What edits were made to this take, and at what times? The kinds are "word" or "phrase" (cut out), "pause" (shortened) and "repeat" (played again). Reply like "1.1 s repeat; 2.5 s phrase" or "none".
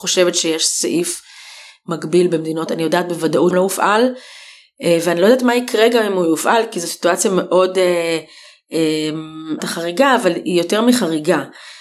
2.7 s word; 3.5 s phrase; 9.6 s phrase